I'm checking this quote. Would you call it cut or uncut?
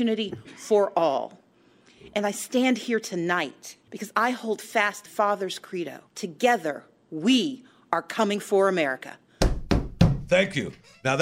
cut